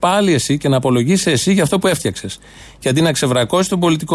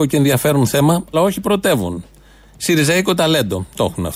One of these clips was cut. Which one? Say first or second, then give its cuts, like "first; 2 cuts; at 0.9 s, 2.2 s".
second; 1 cut; at 1.1 s